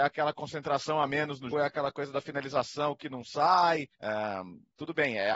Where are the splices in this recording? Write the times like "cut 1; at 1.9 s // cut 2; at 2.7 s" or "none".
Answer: cut 1; at 1.5 s // cut 2; at 3.9 s